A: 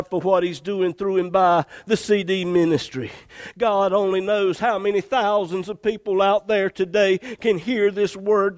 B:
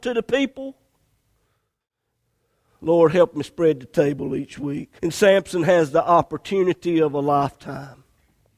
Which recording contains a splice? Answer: B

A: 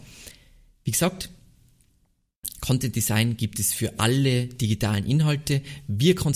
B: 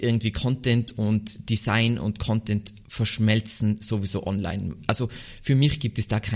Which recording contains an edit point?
B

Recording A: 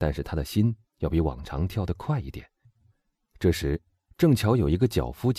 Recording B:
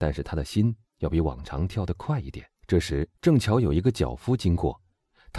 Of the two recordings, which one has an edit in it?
B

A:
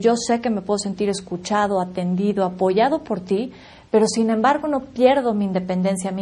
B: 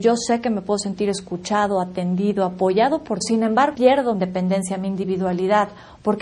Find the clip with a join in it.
B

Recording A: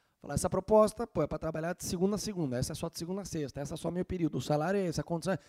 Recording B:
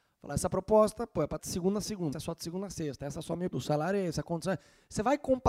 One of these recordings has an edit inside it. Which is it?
B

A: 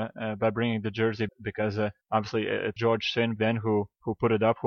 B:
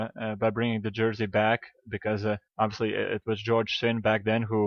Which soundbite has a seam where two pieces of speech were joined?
A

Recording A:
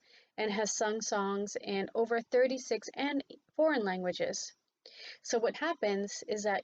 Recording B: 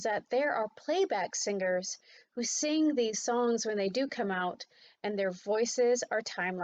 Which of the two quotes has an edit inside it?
A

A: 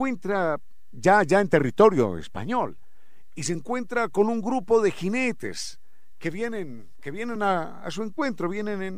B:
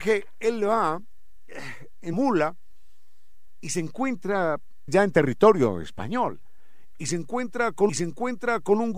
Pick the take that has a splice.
B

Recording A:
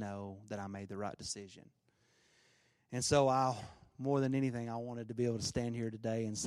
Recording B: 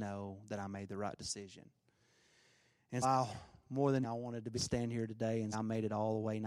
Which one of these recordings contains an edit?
B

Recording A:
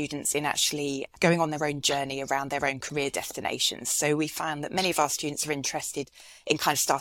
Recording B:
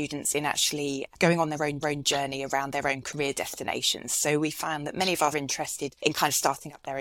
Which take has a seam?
B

